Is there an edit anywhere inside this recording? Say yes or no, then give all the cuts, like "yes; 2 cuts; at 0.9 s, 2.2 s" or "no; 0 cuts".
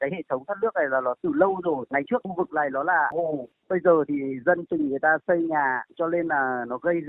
yes; 1 cut; at 3.1 s